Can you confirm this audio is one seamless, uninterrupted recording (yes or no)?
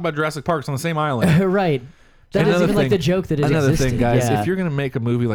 yes